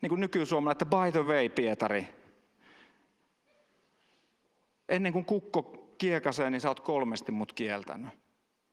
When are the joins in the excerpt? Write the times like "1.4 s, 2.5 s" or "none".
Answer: none